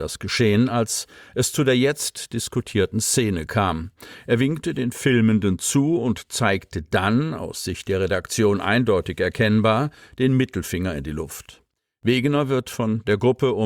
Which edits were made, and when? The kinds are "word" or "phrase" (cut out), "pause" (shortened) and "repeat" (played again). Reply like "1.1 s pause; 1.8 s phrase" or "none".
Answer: none